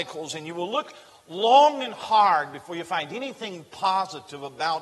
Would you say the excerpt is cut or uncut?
uncut